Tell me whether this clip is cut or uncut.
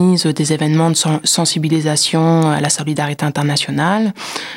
uncut